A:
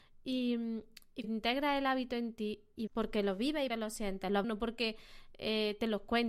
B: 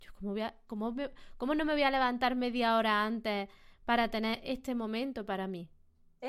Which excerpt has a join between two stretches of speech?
A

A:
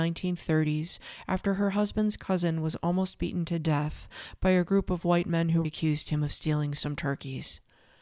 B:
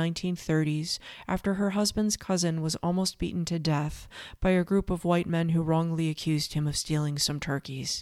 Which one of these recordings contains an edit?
A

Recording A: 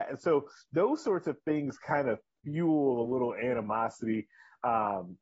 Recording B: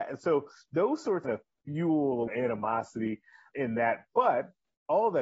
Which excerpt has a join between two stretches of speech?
B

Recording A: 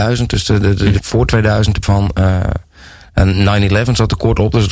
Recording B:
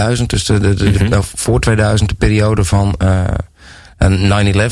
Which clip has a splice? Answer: A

